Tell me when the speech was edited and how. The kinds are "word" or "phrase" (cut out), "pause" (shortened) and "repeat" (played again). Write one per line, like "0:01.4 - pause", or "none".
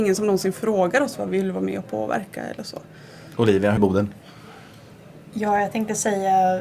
0:03.8 - phrase

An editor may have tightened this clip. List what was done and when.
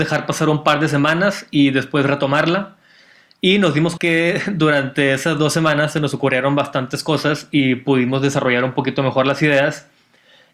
0:04.0 - word

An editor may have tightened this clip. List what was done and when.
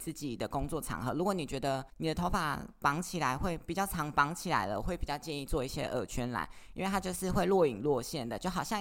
0:01.9 - pause

